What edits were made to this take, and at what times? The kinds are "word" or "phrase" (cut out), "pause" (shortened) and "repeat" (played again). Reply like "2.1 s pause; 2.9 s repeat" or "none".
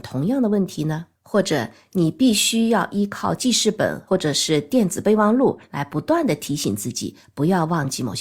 1.1 s pause